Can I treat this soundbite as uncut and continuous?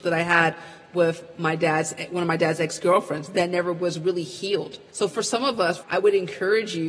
no; 2 cuts; at 4.9 s, 5.8 s

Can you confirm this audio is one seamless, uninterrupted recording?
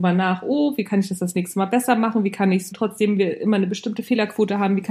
no; 1 cut; at 2.7 s

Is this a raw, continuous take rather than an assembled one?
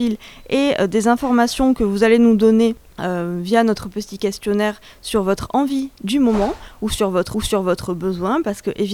no; 1 cut; at 7.3 s

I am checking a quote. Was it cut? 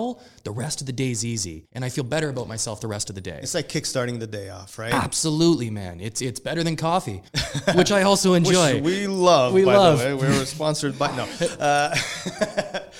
yes; 2 cuts; at 1.6 s, 7.3 s

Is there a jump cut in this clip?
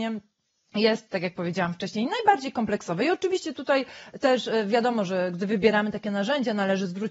no; 0 cuts

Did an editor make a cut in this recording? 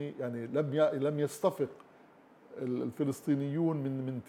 no; 0 cuts

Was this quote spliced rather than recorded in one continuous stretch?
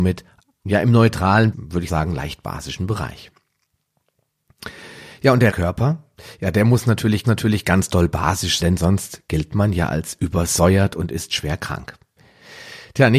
yes; 5 cuts; at 1.5 s, 1.9 s, 5.5 s, 7.2 s, 8.6 s

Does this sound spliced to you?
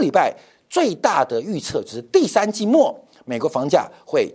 no; 0 cuts

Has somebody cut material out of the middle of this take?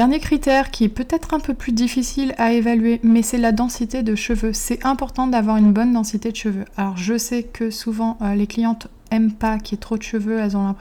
no; 0 cuts

